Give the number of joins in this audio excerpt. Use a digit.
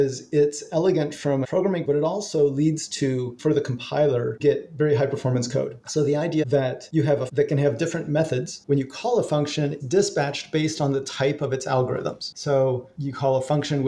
7